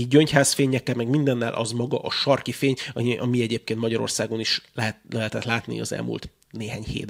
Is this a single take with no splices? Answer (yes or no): yes